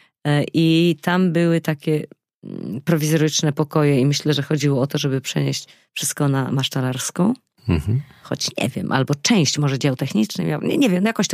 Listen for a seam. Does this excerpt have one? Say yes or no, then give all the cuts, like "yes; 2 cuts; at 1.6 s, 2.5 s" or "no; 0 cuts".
no; 0 cuts